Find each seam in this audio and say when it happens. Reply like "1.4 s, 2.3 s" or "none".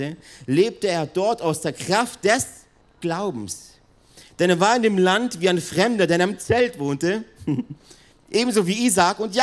2.8 s, 8.1 s